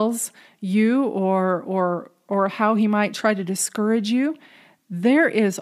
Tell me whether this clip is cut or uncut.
uncut